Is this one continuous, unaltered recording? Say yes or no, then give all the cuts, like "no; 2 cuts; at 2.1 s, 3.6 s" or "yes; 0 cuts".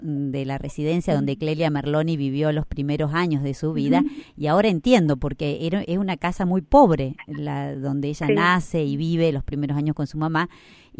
yes; 0 cuts